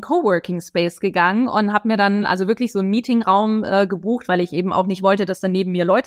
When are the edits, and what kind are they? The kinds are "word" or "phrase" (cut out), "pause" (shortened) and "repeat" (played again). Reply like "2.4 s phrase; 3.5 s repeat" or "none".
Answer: none